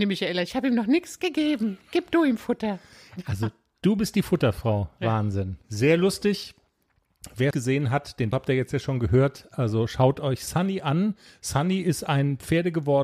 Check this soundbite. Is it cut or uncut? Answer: cut